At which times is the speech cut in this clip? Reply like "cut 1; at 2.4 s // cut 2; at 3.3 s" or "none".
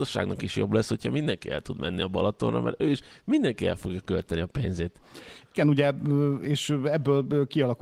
none